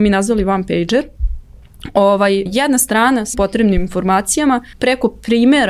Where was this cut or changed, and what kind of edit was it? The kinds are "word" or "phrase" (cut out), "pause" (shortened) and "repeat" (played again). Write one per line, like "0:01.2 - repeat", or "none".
0:02.5 - word
0:03.3 - word
0:04.7 - pause